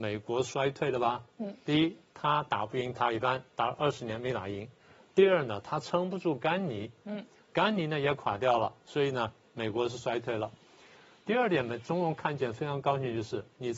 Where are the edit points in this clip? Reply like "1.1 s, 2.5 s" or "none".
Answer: none